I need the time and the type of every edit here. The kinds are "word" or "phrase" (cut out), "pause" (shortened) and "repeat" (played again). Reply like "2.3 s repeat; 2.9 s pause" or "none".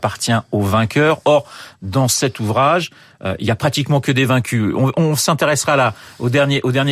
none